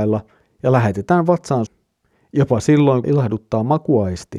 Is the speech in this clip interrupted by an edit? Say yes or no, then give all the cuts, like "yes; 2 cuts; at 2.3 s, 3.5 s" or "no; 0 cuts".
yes; 2 cuts; at 1.7 s, 3.0 s